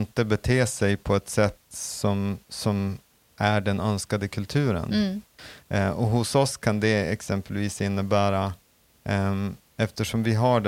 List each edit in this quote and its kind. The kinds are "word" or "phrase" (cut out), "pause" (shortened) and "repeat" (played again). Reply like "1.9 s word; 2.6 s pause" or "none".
none